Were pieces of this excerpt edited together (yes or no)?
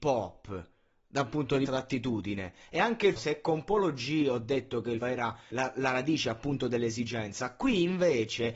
yes